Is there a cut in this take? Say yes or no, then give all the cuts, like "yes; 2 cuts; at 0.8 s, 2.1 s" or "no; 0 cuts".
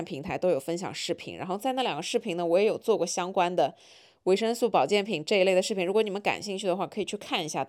no; 0 cuts